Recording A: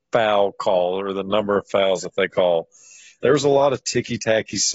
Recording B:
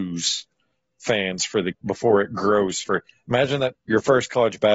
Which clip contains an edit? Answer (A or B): B